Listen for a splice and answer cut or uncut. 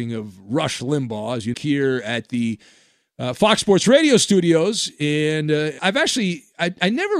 cut